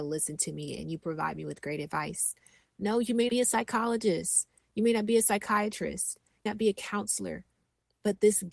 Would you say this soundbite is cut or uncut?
cut